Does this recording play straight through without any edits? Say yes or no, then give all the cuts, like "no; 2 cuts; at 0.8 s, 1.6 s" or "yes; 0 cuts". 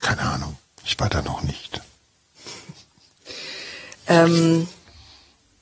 yes; 0 cuts